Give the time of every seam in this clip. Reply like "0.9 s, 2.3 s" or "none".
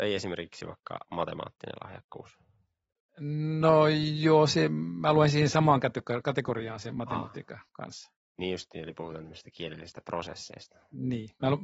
7.7 s